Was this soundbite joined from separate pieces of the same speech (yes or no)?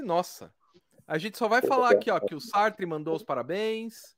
no